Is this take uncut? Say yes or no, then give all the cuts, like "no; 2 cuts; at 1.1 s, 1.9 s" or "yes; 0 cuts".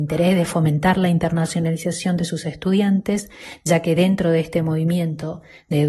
yes; 0 cuts